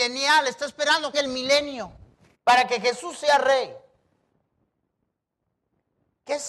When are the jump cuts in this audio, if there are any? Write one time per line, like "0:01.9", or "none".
0:01.1
0:02.3